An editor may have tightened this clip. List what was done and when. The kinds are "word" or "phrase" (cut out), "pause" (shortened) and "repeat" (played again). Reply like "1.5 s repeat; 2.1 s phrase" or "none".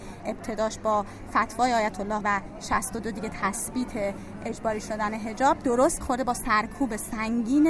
2.2 s word; 6.0 s word